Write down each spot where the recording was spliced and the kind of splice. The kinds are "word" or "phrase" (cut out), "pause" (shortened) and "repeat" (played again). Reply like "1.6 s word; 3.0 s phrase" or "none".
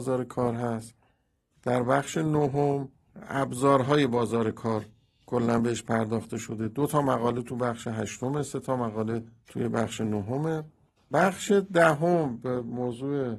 none